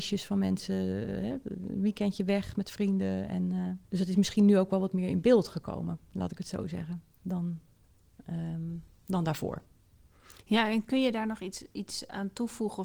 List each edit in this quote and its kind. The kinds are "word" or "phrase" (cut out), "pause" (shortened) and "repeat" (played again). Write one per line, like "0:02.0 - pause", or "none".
0:03.8 - pause